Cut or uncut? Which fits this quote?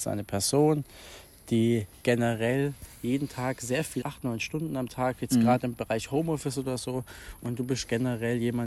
cut